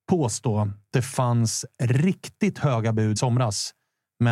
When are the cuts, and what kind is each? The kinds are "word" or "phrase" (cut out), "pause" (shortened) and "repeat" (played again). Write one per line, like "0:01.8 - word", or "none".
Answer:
0:00.9 - word
0:03.2 - phrase